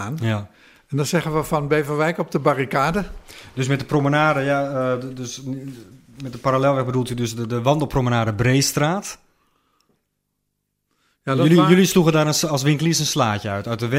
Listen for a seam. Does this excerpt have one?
no; 0 cuts

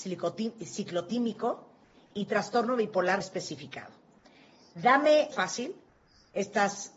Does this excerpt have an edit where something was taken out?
yes; 2 cuts; at 3.2 s, 5.3 s

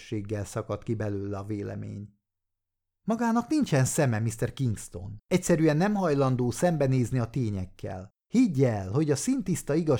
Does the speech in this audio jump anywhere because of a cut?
yes; 2 cuts; at 5.3 s, 8.2 s

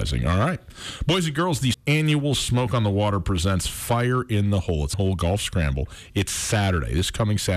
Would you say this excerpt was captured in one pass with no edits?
no; 2 cuts; at 1.7 s, 4.9 s

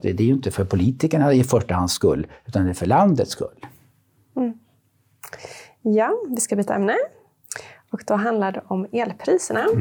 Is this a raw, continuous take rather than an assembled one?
yes; 0 cuts

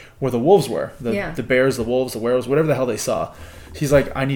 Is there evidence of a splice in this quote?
no; 0 cuts

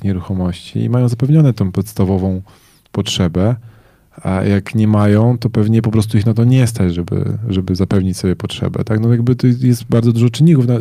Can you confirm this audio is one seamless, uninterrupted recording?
yes; 0 cuts

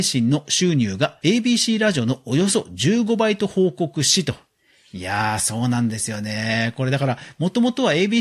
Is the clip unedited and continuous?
yes; 0 cuts

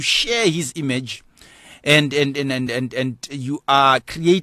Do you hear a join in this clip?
no; 0 cuts

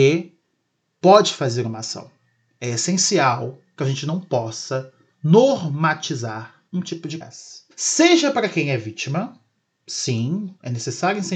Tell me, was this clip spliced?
yes; 3 cuts; at 6.7 s, 7.2 s, 7.7 s

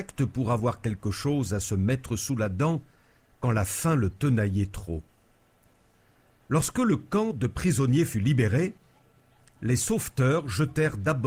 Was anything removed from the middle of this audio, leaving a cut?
no; 0 cuts

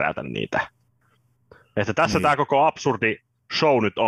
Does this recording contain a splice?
no; 0 cuts

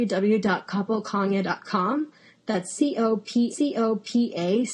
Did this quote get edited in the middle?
yes; 1 cut; at 3.5 s

